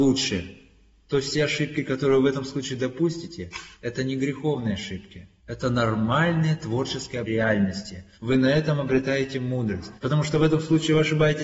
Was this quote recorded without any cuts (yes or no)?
no